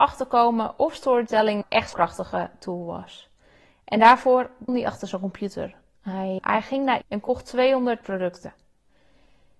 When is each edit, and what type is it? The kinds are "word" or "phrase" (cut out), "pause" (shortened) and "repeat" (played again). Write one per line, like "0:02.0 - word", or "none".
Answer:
0:01.6 - word
0:01.9 - word
0:04.7 - word
0:06.4 - word
0:07.0 - word